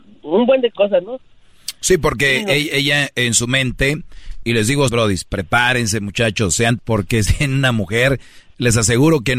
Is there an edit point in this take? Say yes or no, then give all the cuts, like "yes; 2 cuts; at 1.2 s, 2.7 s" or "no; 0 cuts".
yes; 4 cuts; at 4.4 s, 4.9 s, 6.8 s, 7.3 s